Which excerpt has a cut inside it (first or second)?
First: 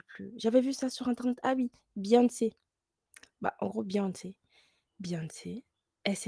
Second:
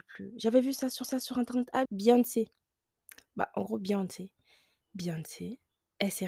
second